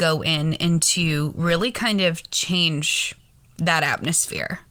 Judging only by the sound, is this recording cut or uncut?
uncut